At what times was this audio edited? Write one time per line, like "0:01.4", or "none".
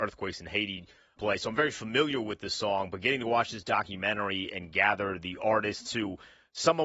0:01.2